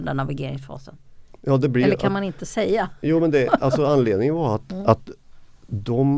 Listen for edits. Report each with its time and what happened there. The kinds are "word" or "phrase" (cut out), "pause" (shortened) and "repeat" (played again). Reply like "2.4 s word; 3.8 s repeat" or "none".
none